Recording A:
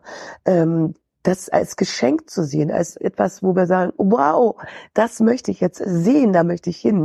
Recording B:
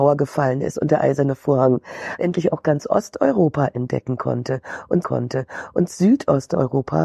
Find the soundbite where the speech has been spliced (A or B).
B